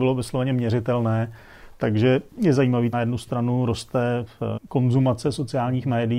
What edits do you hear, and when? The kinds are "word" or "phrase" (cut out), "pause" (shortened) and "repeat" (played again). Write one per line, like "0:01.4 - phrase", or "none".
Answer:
0:02.3 - pause
0:02.9 - phrase
0:04.6 - word